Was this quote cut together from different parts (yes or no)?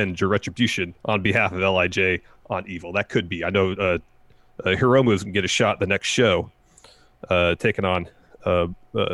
yes